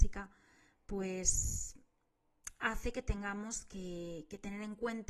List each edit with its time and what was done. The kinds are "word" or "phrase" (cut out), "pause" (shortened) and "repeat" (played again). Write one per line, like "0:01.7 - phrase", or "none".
none